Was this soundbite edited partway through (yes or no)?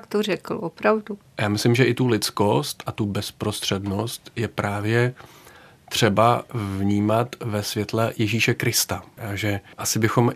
no